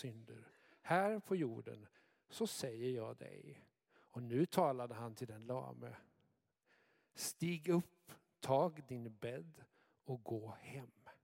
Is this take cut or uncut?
uncut